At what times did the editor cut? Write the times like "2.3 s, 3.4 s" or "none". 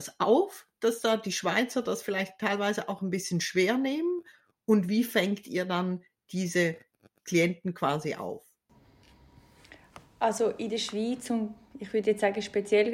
none

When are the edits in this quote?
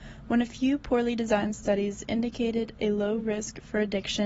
none

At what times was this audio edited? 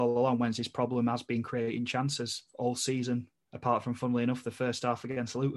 3.4 s

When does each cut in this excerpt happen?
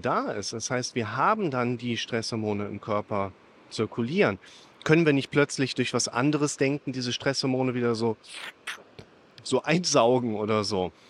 none

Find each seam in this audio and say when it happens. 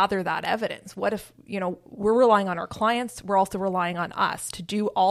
none

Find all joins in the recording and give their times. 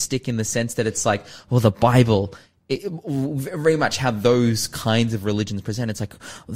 none

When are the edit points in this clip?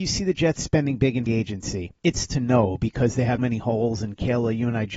1.3 s, 2.3 s, 3.4 s

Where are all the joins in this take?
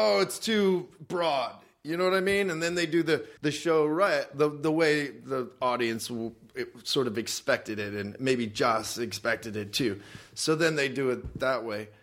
3.4 s

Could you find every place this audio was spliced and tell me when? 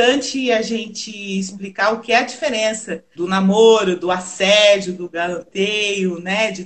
3.2 s

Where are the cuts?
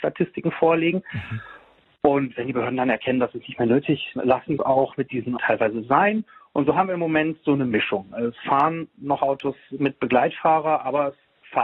4.2 s, 4.6 s, 5.4 s

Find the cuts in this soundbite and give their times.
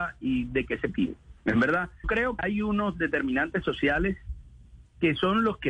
1.4 s, 2.0 s, 2.4 s

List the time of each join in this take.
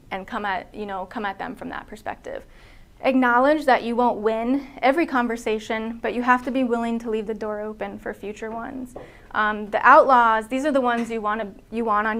none

